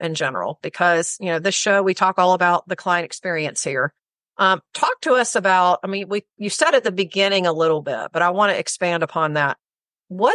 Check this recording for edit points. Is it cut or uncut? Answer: uncut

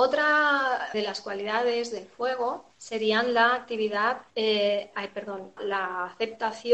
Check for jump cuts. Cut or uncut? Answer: cut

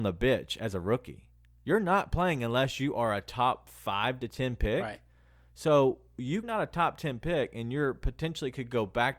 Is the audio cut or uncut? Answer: cut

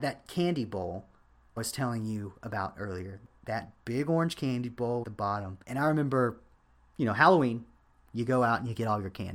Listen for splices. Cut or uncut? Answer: cut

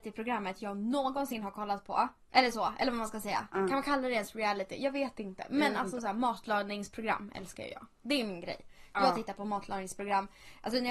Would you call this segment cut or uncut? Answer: cut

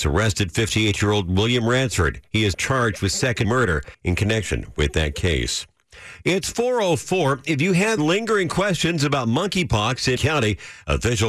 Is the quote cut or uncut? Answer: cut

